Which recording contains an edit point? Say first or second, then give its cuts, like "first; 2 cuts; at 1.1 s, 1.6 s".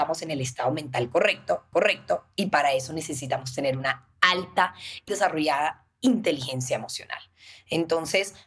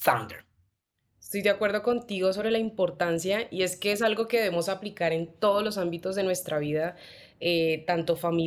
first; 2 cuts; at 1.7 s, 5.1 s